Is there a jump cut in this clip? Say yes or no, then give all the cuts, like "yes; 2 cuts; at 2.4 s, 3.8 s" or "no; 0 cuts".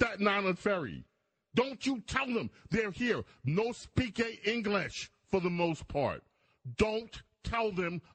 no; 0 cuts